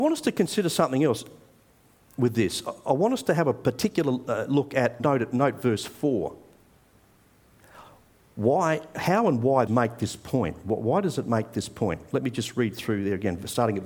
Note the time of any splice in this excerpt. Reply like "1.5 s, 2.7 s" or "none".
5.0 s, 9.7 s